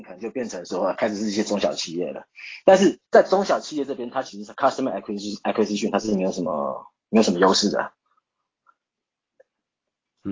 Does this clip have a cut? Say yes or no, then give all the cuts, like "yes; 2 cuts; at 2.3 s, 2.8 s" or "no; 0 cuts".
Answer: yes; 1 cut; at 3.1 s